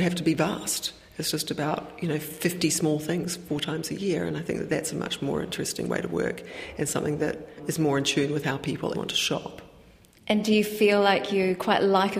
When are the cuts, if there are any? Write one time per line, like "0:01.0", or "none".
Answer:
0:08.9